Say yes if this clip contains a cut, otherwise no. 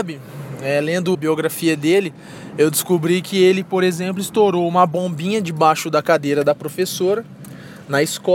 yes